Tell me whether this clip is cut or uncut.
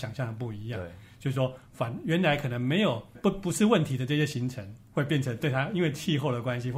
cut